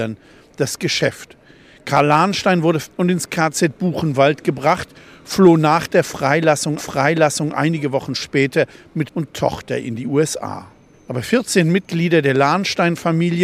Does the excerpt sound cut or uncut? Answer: cut